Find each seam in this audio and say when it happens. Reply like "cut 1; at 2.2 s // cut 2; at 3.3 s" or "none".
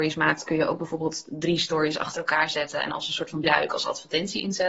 cut 1; at 3.4 s